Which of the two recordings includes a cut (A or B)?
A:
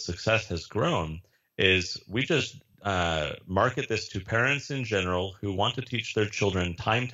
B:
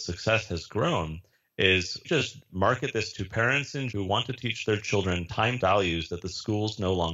B